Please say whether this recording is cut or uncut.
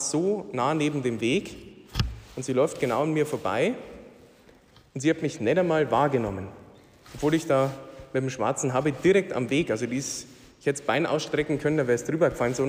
uncut